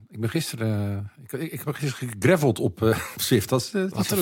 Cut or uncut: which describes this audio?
uncut